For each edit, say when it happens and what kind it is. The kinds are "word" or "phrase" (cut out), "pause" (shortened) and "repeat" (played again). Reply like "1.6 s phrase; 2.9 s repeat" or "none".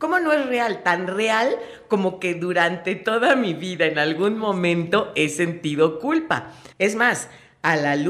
6.7 s pause